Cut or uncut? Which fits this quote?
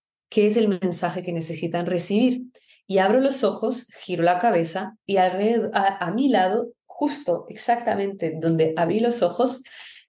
uncut